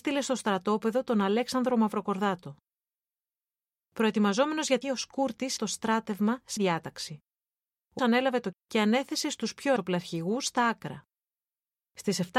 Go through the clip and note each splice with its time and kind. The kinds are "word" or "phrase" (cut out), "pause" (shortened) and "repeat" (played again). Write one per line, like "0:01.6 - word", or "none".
0:04.8 - word
0:05.6 - word
0:06.6 - word
0:08.0 - word
0:08.5 - word
0:09.8 - word